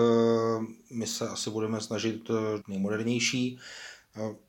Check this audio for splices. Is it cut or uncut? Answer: cut